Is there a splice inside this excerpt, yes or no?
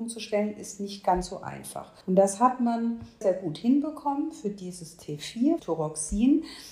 yes